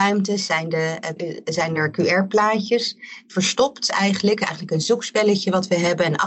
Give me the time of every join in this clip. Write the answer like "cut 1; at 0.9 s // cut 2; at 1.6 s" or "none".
cut 1; at 1.2 s